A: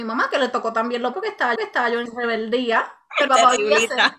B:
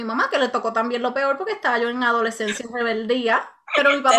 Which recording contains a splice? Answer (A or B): A